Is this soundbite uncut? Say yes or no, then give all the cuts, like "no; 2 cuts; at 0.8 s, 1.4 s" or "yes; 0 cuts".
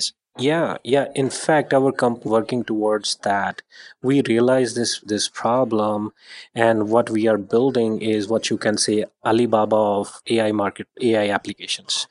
no; 2 cuts; at 2.2 s, 5.0 s